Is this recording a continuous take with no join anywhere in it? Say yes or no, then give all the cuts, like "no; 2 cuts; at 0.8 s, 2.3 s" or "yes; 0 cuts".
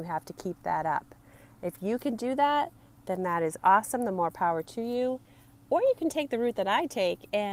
yes; 0 cuts